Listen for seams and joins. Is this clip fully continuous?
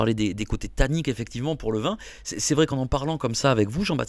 yes; 0 cuts

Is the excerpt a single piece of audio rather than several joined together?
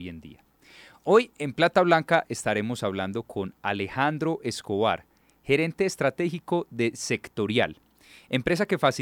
yes; 0 cuts

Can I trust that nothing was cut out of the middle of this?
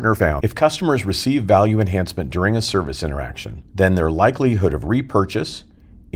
no; 1 cut; at 3.7 s

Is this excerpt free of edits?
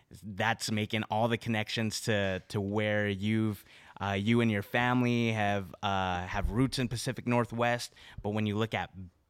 yes; 0 cuts

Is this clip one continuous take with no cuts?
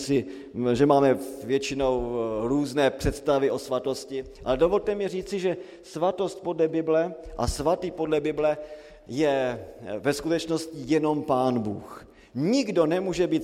yes; 0 cuts

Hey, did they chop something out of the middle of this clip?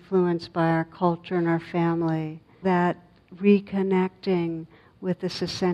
yes; 1 cut; at 2.6 s

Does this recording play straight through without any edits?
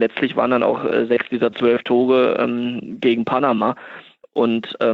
yes; 0 cuts

